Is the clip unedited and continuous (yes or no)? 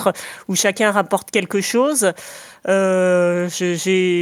yes